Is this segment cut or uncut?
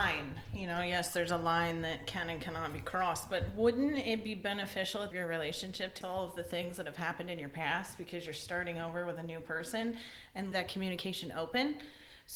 cut